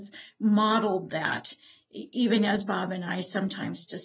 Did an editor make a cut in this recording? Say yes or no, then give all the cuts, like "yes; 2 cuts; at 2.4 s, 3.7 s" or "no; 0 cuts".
no; 0 cuts